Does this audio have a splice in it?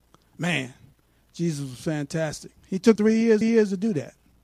yes; 3 cuts; at 2.6 s, 3.0 s, 3.4 s

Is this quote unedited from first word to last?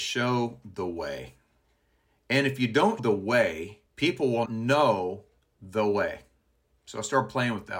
no; 5 cuts; at 1.6 s, 3.0 s, 3.9 s, 4.5 s, 5.4 s

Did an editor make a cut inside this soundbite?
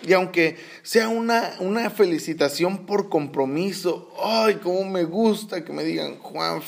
no; 0 cuts

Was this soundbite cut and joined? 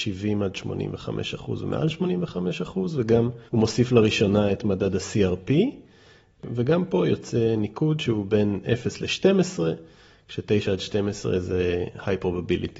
yes; 1 cut; at 3.5 s

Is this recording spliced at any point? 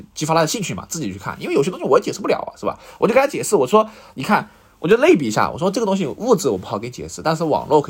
no; 0 cuts

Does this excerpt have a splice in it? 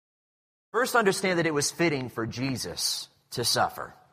no; 0 cuts

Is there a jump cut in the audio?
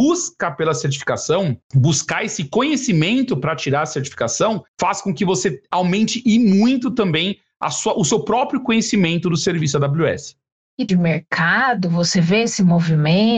yes; 3 cuts; at 1.6 s, 4.7 s, 10.9 s

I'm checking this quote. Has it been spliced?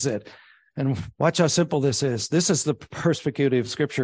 no; 0 cuts

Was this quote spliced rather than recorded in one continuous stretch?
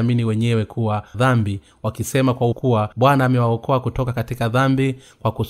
yes; 3 cuts; at 1.1 s, 2.5 s, 2.9 s

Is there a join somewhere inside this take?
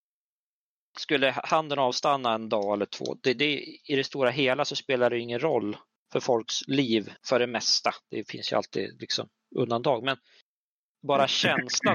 yes; 2 cuts; at 6.0 s, 7.2 s

